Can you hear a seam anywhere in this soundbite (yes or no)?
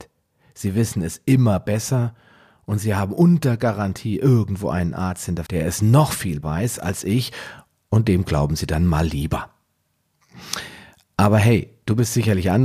yes